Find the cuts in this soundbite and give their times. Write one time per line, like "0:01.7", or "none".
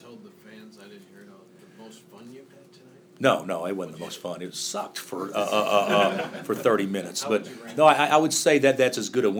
none